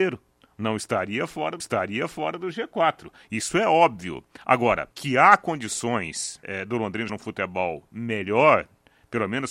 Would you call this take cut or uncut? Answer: cut